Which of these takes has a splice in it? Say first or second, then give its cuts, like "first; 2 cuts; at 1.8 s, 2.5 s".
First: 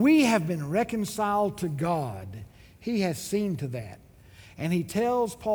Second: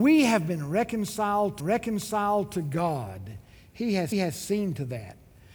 second; 2 cuts; at 1.6 s, 4.1 s